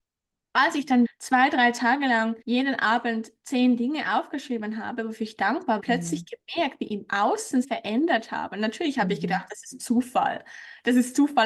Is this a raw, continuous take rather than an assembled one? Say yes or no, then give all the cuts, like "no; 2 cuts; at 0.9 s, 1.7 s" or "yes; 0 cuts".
no; 4 cuts; at 1.0 s, 2.4 s, 5.8 s, 7.6 s